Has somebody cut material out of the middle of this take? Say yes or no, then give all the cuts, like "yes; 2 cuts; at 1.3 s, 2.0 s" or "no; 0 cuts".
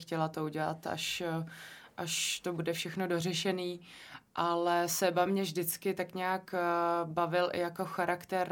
no; 0 cuts